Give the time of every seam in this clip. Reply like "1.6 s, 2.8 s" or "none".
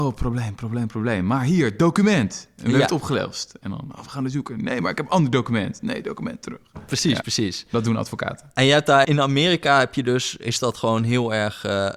7.2 s, 9.0 s

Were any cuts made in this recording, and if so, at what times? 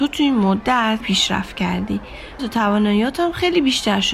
1.0 s, 2.4 s

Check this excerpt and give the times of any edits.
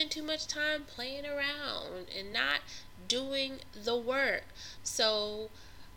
none

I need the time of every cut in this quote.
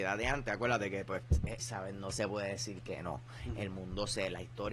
1.6 s

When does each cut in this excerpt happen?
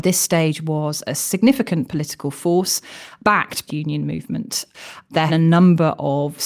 3.7 s, 5.3 s

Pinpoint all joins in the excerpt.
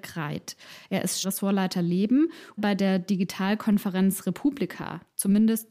1.2 s, 2.6 s

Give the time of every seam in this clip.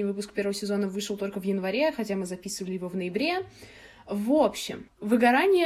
none

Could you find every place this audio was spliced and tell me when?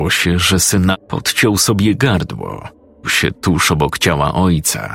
0.9 s, 3.0 s

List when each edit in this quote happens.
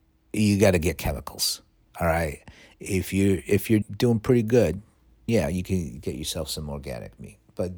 3.8 s, 5.3 s

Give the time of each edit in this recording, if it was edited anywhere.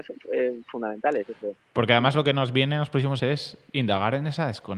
3.2 s

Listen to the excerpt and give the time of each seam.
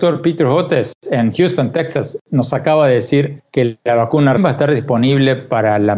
4.4 s

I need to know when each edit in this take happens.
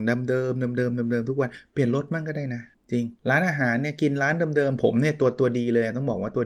2.7 s, 3.2 s

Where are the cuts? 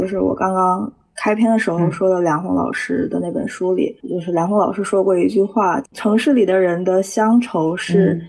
4.0 s

